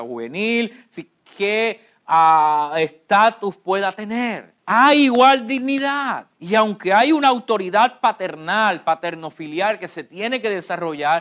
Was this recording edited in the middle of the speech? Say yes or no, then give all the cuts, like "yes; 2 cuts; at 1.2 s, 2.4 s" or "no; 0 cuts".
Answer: yes; 2 cuts; at 4.6 s, 6.3 s